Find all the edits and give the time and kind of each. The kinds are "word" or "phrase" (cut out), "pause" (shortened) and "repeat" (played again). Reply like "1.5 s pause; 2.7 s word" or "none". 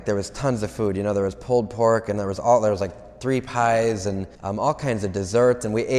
4.3 s pause

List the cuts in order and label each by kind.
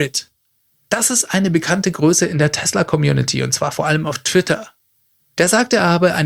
none

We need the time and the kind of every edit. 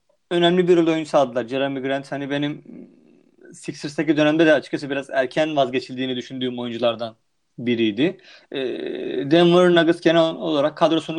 none

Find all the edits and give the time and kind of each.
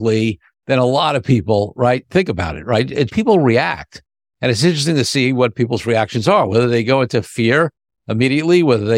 3.1 s word

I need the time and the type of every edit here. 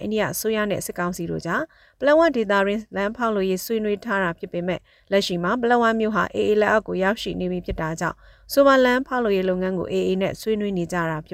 none

